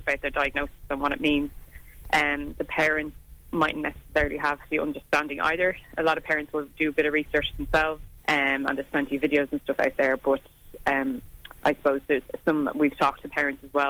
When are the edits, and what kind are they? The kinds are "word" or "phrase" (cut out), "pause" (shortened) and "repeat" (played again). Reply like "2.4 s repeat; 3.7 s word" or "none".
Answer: 3.4 s pause; 8.2 s pause; 11.5 s pause